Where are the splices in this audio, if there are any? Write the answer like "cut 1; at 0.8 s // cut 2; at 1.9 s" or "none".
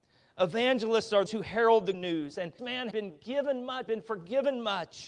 cut 1; at 1.3 s // cut 2; at 1.9 s // cut 3; at 2.6 s // cut 4; at 2.9 s // cut 5; at 3.9 s